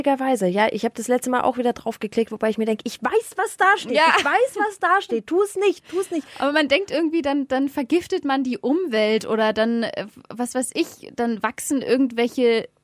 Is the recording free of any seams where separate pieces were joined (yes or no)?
yes